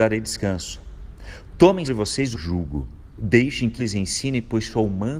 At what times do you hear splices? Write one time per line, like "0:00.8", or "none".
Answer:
0:01.8
0:02.3
0:03.8